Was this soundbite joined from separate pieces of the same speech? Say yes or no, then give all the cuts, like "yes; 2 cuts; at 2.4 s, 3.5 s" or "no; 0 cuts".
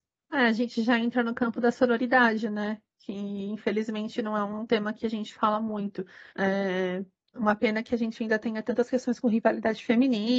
yes; 1 cut; at 6.3 s